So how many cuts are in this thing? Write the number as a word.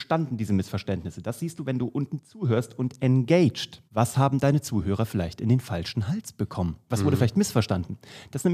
one